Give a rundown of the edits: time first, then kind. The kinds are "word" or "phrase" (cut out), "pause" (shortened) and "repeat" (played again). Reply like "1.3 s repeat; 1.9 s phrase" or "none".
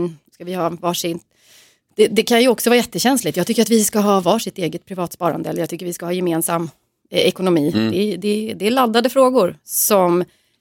none